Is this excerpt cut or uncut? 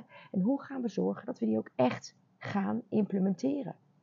uncut